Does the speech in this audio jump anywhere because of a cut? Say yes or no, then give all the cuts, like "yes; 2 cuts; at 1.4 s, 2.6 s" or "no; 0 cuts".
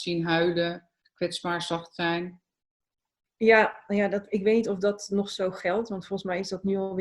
no; 0 cuts